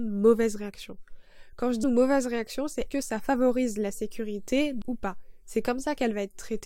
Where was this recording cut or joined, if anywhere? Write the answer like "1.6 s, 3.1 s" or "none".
1.8 s, 2.9 s, 4.8 s